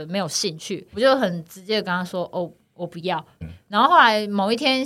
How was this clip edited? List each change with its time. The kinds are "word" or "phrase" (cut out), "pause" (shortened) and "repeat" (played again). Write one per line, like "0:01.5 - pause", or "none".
0:00.9 - word
0:03.4 - word

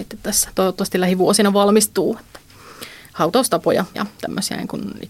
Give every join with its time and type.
0:03.9 - word

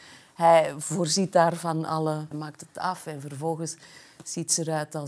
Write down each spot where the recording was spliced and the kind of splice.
0:02.3 - phrase

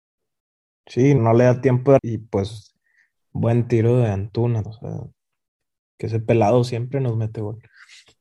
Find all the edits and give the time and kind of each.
0:01.2 - word
0:02.0 - word
0:04.7 - word

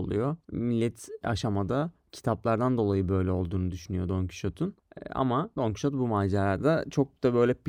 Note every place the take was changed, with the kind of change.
0:01.2 - word

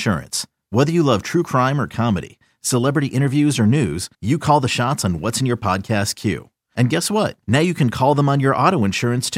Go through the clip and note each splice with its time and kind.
0:04.1 - pause
0:07.4 - pause

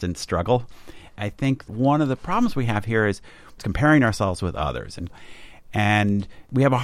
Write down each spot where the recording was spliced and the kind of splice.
0:01.7 - word

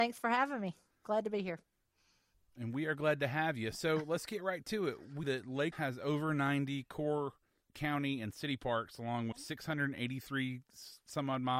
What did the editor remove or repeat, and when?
0:05.2 - word
0:05.7 - word
0:07.7 - word
0:09.3 - word

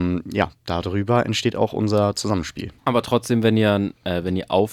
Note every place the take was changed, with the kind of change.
0:02.8 - pause

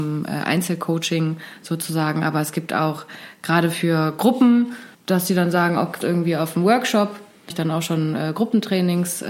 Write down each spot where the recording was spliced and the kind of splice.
0:04.9 - pause
0:06.0 - phrase
0:07.5 - word

